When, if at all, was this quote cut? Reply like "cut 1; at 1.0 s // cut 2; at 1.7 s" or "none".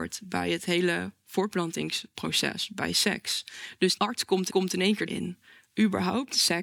cut 1; at 4.0 s // cut 2; at 4.5 s // cut 3; at 5.1 s